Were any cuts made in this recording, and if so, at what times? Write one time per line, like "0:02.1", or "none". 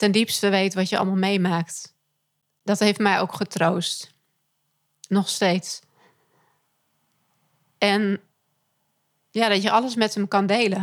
none